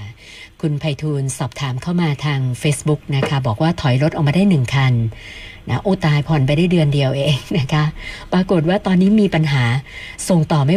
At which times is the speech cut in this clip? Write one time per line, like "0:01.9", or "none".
none